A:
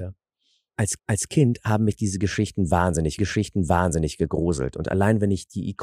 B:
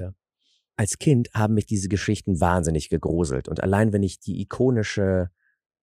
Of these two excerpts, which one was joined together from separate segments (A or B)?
A